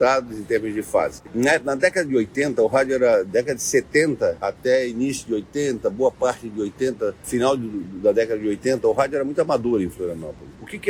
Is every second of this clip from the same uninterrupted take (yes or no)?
yes